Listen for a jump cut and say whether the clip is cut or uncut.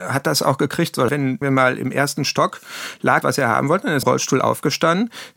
cut